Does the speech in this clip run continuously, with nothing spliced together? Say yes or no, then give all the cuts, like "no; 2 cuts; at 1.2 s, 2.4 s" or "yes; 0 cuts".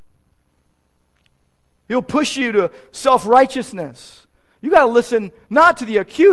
yes; 0 cuts